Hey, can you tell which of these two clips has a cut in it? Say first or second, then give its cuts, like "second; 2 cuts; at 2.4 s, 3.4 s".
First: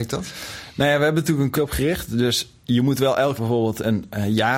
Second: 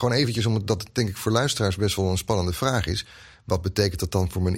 first; 2 cuts; at 1.6 s, 3.4 s